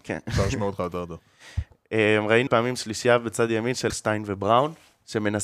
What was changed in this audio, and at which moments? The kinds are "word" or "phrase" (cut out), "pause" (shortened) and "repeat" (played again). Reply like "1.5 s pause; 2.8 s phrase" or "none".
2.5 s word; 3.9 s word